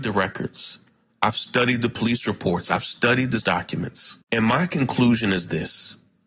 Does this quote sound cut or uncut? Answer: cut